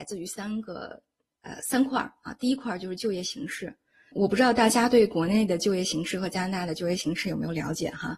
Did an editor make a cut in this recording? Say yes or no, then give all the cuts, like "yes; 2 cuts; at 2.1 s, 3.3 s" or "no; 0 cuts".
no; 0 cuts